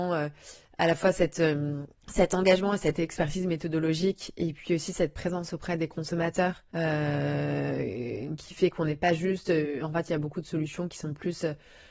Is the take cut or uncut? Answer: cut